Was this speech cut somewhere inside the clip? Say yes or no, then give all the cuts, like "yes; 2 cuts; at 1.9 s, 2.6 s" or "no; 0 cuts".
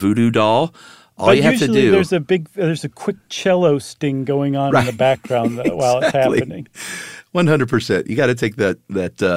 no; 0 cuts